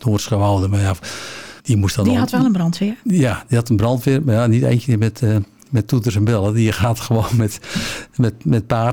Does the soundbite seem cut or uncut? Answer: cut